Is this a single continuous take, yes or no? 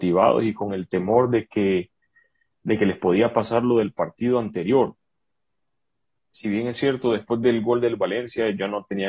yes